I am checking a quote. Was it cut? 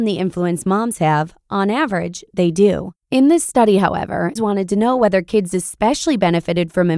yes; 2 cuts; at 3.0 s, 4.4 s

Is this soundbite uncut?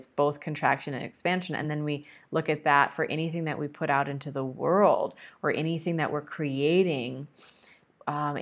yes; 0 cuts

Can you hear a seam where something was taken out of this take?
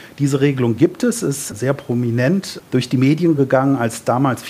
no; 0 cuts

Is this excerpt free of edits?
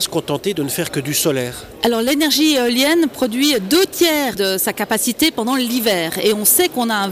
yes; 0 cuts

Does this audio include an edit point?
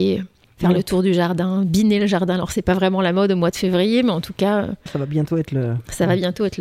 yes; 1 cut; at 4.9 s

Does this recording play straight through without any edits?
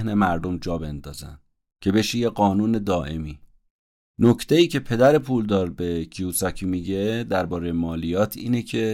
yes; 0 cuts

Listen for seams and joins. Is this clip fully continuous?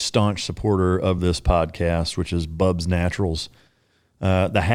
yes; 0 cuts

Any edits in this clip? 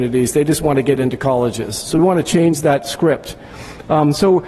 no; 0 cuts

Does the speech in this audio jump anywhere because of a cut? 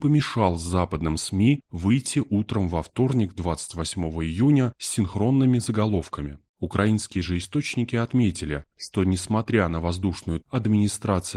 yes; 2 cuts; at 6.5 s, 10.4 s

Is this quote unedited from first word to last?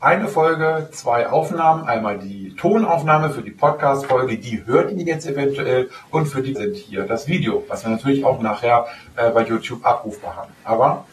no; 1 cut; at 6.6 s

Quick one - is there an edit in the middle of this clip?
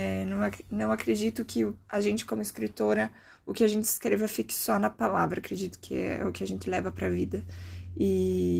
yes; 1 cut; at 1.8 s

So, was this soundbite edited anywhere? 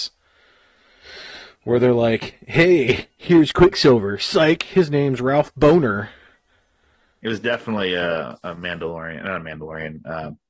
no; 0 cuts

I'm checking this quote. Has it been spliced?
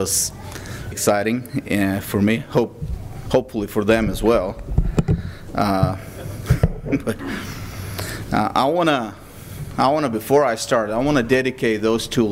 yes; 1 cut; at 0.9 s

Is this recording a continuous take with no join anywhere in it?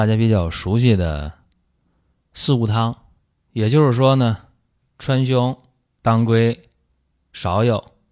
yes; 0 cuts

